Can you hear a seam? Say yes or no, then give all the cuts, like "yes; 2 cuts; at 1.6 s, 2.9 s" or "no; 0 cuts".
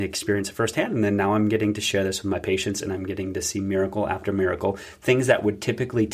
no; 0 cuts